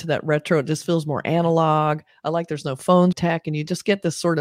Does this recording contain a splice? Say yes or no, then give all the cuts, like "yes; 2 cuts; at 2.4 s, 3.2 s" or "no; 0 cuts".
yes; 1 cut; at 3.1 s